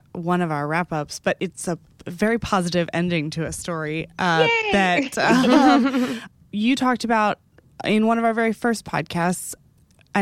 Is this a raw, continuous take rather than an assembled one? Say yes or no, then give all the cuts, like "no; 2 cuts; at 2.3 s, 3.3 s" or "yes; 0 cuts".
yes; 0 cuts